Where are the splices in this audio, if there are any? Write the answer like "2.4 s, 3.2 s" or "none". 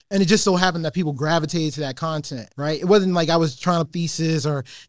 2.5 s, 3.9 s